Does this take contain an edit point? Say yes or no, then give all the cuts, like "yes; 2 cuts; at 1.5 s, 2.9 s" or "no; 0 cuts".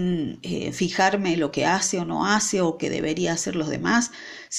no; 0 cuts